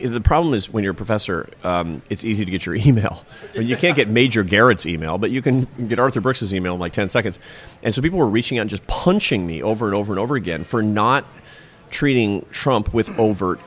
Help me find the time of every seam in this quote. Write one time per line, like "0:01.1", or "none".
none